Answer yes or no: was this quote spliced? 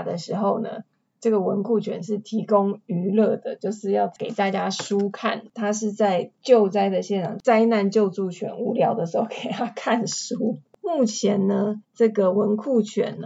yes